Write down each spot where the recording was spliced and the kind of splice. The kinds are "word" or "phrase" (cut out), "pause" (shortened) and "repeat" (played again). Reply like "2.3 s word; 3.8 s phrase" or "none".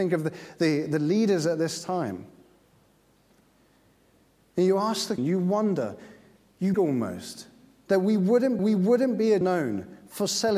5.2 s word; 6.7 s word; 8.6 s repeat; 9.4 s word